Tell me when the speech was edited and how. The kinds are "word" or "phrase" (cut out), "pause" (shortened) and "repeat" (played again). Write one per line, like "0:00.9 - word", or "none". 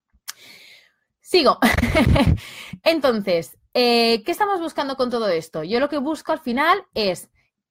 none